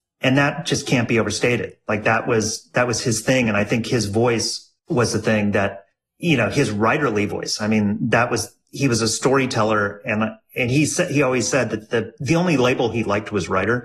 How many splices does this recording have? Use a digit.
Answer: 2